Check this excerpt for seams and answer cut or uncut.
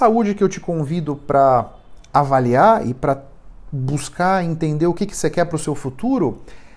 uncut